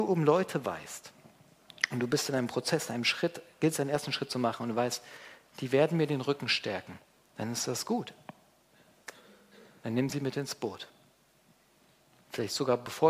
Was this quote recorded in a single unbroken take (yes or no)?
yes